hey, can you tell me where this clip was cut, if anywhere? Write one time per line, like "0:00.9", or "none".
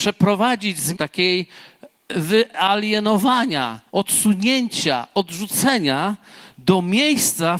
0:00.9
0:03.9